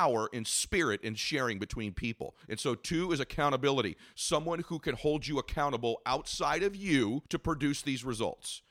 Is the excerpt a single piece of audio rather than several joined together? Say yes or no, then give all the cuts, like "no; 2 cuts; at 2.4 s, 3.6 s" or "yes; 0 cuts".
no; 2 cuts; at 2.4 s, 7.3 s